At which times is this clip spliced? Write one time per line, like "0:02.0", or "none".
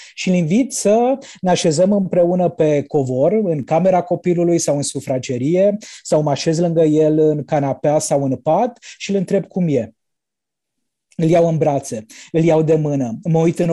none